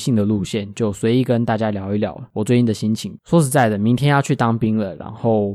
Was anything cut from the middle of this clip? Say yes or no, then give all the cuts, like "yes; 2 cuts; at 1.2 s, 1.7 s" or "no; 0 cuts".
yes; 1 cut; at 3.2 s